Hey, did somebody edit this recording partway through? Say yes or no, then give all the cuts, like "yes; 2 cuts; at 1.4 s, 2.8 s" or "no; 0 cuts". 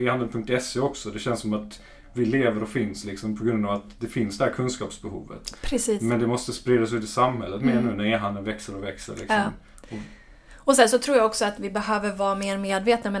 no; 0 cuts